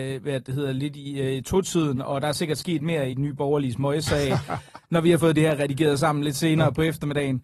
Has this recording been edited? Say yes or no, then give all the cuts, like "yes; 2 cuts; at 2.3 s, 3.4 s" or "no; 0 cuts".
yes; 1 cut; at 3.1 s